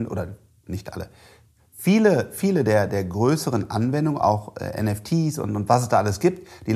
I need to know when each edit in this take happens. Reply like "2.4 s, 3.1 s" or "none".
none